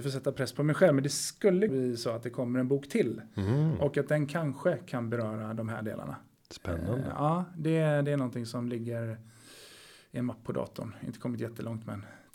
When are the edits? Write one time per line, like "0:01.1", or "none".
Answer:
0:01.7